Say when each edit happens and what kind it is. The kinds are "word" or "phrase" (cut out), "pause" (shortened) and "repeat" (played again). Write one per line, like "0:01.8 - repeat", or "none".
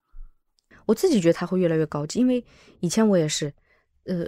none